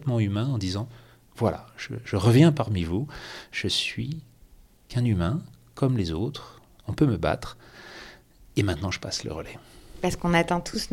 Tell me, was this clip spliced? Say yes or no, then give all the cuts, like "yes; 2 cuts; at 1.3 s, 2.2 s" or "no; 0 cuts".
yes; 1 cut; at 2.0 s